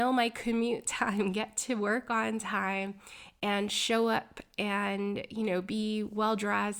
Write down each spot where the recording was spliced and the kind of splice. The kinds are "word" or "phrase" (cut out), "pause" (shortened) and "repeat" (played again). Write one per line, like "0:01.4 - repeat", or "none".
none

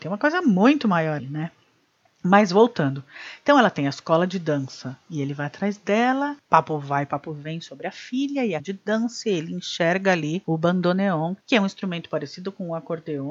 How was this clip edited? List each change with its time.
0:01.2 - word
0:08.6 - word

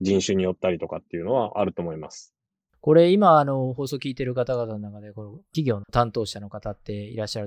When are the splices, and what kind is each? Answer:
none

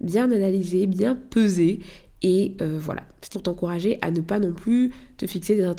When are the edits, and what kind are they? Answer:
0:03.3 - word

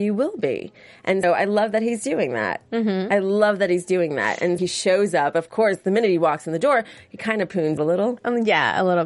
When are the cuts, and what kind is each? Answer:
0:01.2 - word
0:04.6 - word
0:07.8 - word

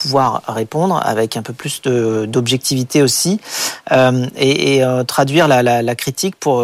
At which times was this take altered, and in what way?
none

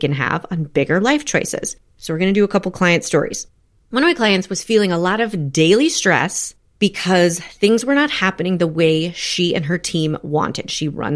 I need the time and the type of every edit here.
none

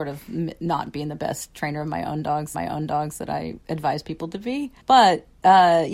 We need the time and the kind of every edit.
0:02.5 - repeat
0:03.6 - pause
0:04.8 - pause

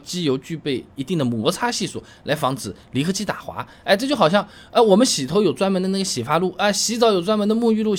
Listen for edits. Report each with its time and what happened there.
none

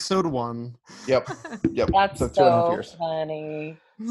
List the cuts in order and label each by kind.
none

